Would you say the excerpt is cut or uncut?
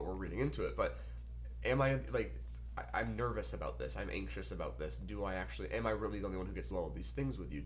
cut